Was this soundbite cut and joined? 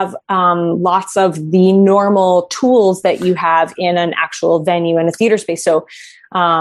no; 0 cuts

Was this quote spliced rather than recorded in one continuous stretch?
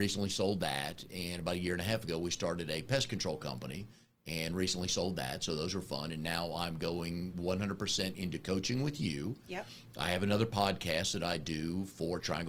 no; 0 cuts

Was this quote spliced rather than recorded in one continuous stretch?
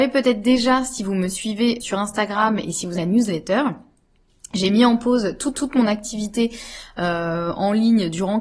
yes; 3 cuts; at 1.8 s, 3.0 s, 5.5 s

